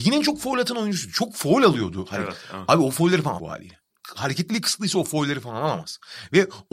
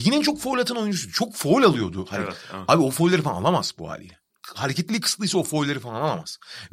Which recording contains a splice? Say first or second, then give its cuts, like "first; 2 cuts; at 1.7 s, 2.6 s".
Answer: first; 1 cut; at 3.4 s